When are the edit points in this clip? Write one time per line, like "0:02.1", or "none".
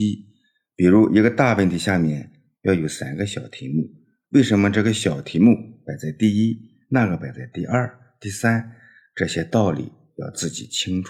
none